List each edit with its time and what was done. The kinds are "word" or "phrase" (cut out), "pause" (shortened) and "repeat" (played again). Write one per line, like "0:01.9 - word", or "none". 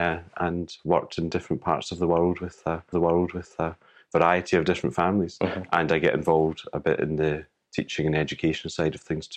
0:02.9 - repeat